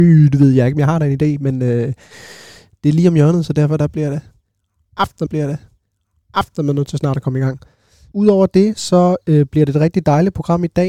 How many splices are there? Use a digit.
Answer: 1